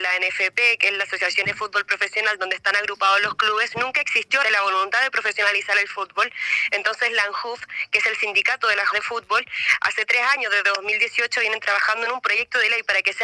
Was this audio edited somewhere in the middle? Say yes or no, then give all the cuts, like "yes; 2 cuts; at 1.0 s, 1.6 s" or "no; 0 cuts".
yes; 3 cuts; at 1.4 s, 4.4 s, 8.9 s